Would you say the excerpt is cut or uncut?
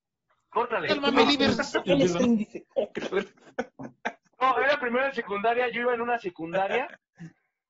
uncut